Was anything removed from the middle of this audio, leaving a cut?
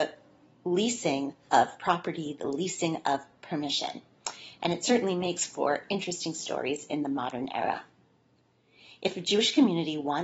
no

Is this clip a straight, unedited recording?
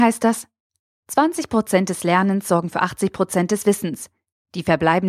yes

